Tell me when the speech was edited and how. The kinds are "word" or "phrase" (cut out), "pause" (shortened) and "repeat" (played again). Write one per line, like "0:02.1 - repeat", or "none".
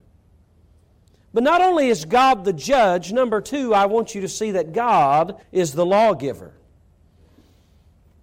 0:05.4 - pause